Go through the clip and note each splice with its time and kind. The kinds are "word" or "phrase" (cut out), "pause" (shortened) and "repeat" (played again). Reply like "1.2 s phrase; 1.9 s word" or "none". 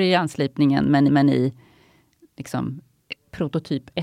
1.1 s repeat